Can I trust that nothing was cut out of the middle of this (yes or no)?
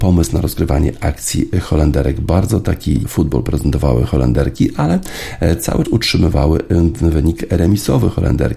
no